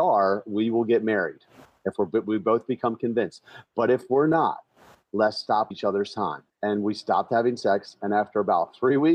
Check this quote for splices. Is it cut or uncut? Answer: cut